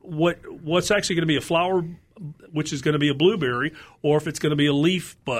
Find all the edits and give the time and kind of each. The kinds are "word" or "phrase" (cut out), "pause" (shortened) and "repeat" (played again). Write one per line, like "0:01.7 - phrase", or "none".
none